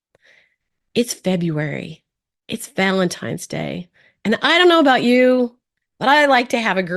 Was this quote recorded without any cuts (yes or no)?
yes